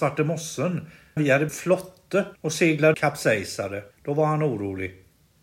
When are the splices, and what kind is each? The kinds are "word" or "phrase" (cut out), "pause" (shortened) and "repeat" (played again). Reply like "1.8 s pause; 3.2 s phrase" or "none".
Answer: 1.2 s word; 1.5 s phrase; 2.4 s pause; 2.9 s phrase; 3.9 s pause